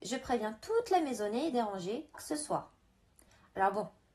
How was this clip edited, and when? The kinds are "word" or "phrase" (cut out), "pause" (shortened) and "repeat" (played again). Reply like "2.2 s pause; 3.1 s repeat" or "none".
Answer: 1.5 s phrase; 2.1 s phrase